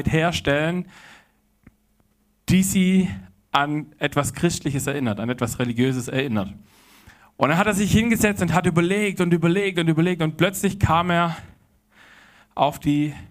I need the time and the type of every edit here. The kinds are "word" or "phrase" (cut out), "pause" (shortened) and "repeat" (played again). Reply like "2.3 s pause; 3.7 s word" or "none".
none